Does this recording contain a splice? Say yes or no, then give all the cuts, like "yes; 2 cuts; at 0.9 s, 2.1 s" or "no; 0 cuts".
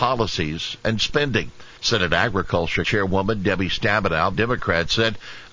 yes; 3 cuts; at 1.8 s, 2.8 s, 4.3 s